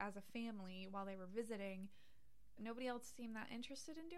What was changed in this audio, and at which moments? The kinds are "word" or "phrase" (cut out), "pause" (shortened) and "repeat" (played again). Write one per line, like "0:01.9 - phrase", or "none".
0:02.6 - word